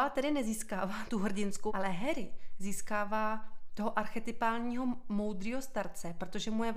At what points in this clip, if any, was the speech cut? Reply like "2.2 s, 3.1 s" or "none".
1.1 s, 1.7 s